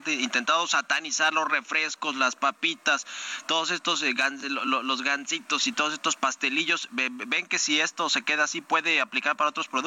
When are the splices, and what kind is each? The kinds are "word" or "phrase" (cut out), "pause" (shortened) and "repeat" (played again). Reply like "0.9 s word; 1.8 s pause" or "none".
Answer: none